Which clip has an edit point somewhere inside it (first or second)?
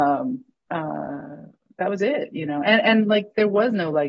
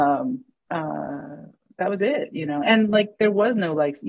second